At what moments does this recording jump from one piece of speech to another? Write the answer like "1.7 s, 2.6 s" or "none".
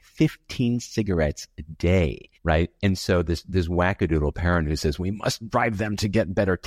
2.4 s